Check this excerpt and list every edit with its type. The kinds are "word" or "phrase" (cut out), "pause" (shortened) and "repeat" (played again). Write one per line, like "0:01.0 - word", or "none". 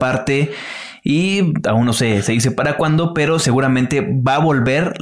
none